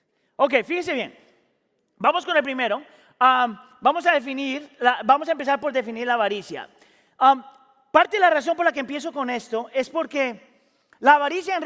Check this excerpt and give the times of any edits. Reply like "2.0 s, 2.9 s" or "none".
none